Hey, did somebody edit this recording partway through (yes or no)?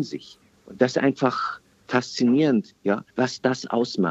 yes